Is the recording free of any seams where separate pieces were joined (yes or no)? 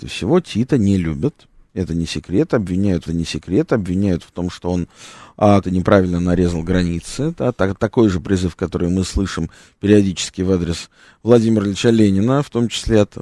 no